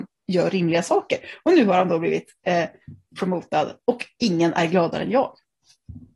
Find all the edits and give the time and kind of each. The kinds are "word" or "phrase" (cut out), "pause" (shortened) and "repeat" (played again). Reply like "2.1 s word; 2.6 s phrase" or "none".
none